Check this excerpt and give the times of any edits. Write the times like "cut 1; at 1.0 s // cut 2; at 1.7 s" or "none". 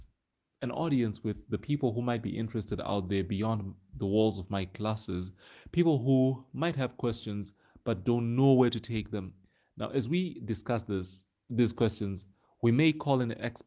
none